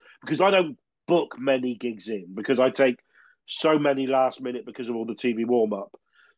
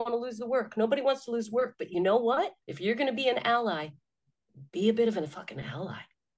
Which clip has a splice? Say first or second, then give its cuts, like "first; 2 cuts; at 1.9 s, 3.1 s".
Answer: second; 2 cuts; at 2.6 s, 4.7 s